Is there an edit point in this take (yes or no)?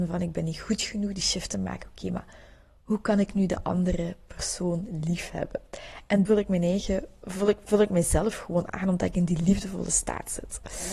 yes